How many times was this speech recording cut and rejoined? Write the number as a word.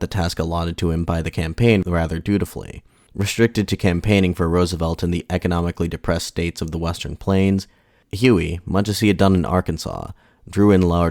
zero